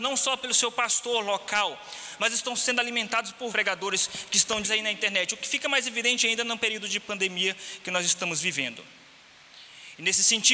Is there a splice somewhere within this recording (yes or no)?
yes